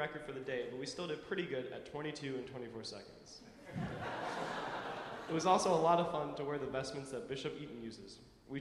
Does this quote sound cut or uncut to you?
uncut